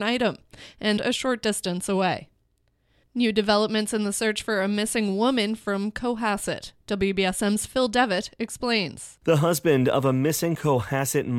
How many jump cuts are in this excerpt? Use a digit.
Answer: 1